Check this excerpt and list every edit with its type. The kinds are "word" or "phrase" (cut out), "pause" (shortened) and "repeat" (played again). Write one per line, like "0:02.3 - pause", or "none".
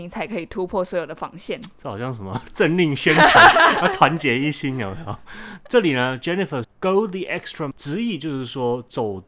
0:06.6 - word
0:07.7 - word